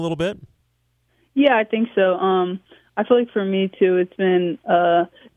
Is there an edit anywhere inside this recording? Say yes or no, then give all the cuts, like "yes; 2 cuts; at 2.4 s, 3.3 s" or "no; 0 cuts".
no; 0 cuts